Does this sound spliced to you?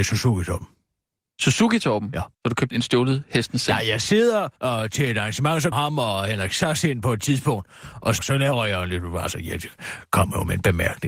yes; 5 cuts; at 2.3 s, 2.7 s, 4.6 s, 5.7 s, 8.2 s

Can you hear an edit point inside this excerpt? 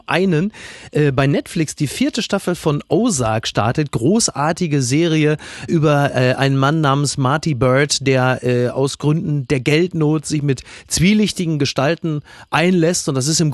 no; 0 cuts

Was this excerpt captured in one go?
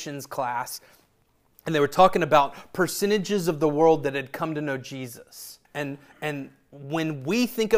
no; 1 cut; at 5.6 s

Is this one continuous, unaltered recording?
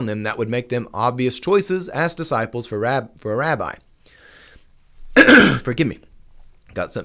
yes; 0 cuts

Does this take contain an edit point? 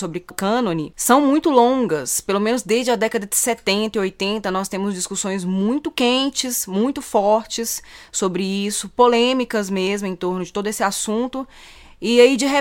no; 0 cuts

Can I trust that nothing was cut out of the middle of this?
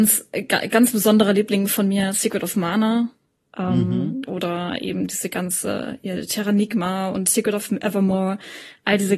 yes; 0 cuts

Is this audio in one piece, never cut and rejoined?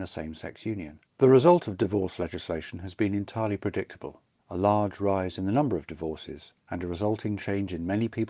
no; 3 cuts; at 1.1 s, 4.4 s, 6.6 s

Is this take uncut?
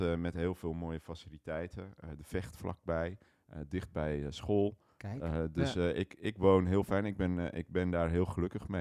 yes; 0 cuts

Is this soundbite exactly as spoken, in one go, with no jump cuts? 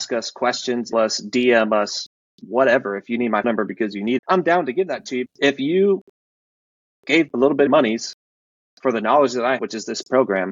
no; 7 cuts; at 0.9 s, 3.4 s, 4.2 s, 5.3 s, 7.3 s, 7.7 s, 9.6 s

